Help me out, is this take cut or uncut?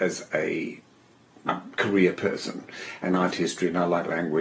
cut